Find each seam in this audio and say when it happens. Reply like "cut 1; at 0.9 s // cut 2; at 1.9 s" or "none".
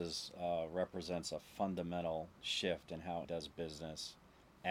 cut 1; at 3.2 s